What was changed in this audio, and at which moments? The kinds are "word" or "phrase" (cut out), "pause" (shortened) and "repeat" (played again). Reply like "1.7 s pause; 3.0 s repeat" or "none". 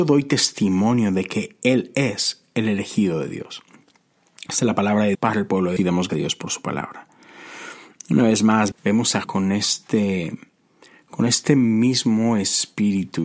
5.1 s word; 5.8 s word; 6.1 s word; 8.7 s word; 9.2 s word